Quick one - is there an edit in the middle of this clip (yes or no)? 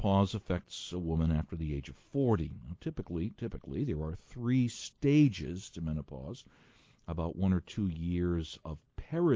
no